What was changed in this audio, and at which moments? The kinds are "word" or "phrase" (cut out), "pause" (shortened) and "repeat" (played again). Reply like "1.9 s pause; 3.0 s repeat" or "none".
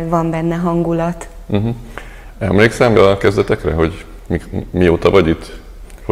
2.9 s word

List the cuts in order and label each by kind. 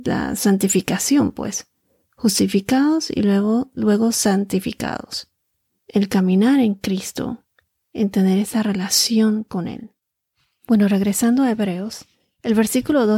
none

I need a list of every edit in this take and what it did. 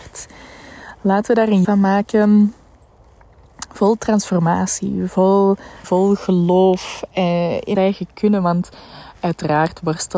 1.6 s word; 5.8 s word; 7.7 s word

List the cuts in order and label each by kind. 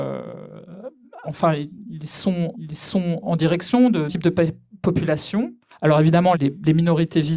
1.2 s phrase; 2.5 s repeat; 4.1 s word; 5.7 s pause; 6.3 s word

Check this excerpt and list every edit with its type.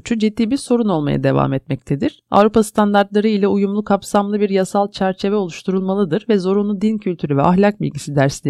none

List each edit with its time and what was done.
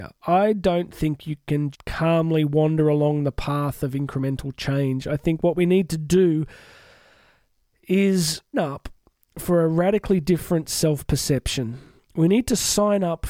1.7 s word; 8.5 s word

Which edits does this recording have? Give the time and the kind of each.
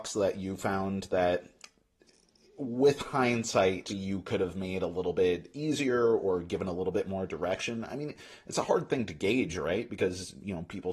3.9 s word

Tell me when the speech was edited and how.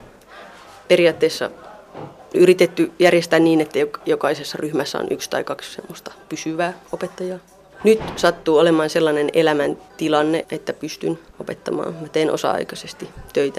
2.3 s word; 10.4 s word

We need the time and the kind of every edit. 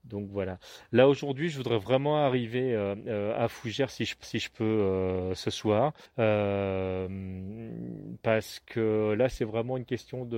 4.2 s repeat; 6.1 s pause

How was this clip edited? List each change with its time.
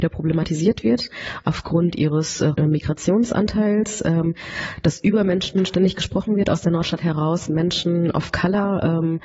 2.5 s word

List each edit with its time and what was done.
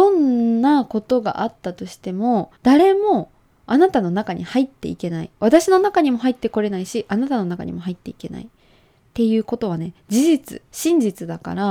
2.6 s pause

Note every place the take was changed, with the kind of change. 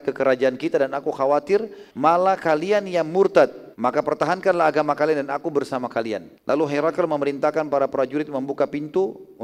1.9 s pause; 3.7 s pause; 6.4 s pause

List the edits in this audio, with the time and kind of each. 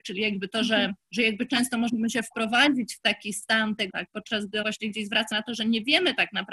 1.0 s pause; 3.9 s phrase; 4.6 s word; 5.3 s word

